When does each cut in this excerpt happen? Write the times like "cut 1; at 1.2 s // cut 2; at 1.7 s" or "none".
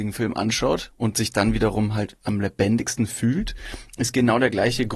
none